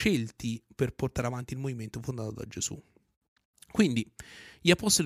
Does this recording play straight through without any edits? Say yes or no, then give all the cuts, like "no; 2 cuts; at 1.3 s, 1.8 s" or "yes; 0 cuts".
yes; 0 cuts